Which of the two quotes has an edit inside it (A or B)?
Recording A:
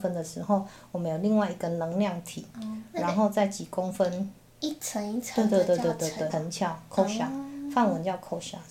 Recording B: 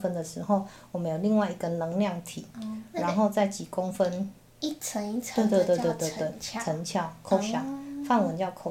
A